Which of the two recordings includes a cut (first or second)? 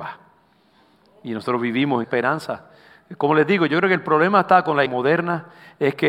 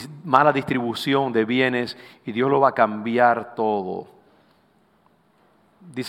first